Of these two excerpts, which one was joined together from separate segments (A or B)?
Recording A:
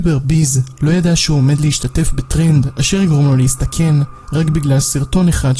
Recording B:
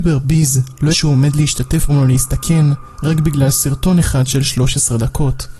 B